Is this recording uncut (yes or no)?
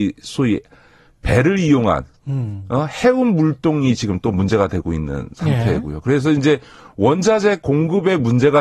yes